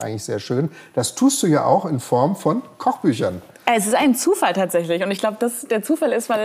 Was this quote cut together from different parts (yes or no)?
no